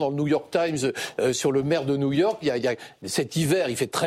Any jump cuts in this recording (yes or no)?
yes